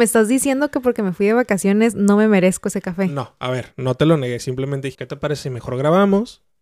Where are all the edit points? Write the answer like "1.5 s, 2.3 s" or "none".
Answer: 4.9 s